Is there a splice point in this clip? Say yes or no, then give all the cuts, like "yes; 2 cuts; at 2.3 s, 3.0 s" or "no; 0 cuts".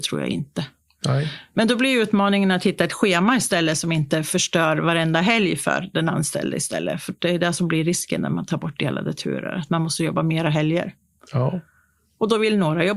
no; 0 cuts